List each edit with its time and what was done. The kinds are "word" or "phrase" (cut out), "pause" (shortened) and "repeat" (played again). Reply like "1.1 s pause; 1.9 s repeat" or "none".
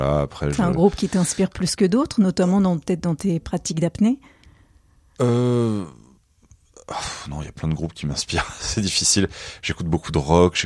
none